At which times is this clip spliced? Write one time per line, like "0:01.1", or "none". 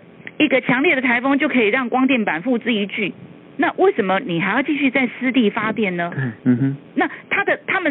0:06.4